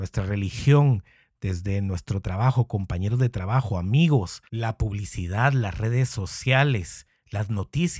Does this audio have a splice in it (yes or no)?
yes